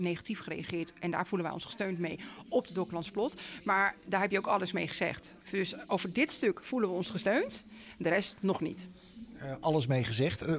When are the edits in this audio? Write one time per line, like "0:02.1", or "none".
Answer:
0:05.4